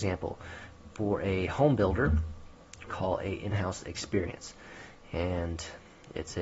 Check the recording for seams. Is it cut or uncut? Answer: cut